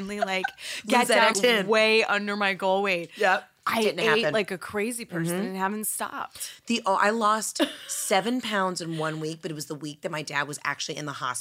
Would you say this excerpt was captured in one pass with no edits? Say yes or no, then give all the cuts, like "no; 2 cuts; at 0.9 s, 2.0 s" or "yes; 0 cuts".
no; 1 cut; at 1.3 s